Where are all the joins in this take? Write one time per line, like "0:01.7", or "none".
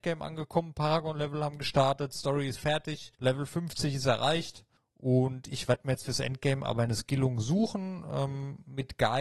0:03.1
0:04.8